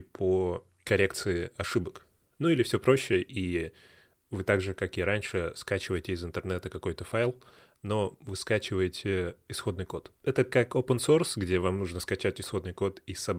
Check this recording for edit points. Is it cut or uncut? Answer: uncut